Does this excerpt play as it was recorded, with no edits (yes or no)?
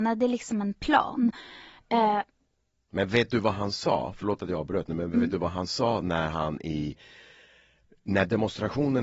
yes